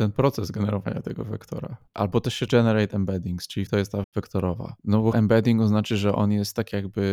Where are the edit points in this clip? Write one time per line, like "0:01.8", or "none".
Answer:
0:01.9
0:02.5
0:03.7
0:04.0
0:04.8
0:05.1